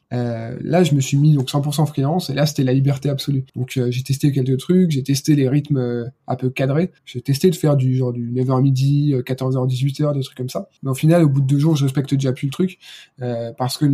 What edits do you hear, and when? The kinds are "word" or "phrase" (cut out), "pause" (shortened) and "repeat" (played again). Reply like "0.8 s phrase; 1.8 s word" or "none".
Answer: 3.5 s pause; 7.0 s pause; 10.8 s pause